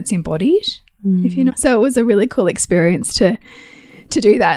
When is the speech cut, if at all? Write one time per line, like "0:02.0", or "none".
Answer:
0:01.5